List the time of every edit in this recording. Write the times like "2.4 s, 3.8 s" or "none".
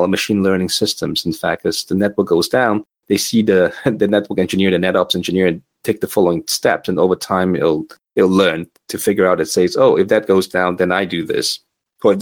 none